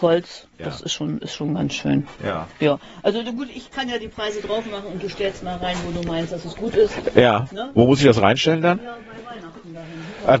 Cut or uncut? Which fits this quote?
cut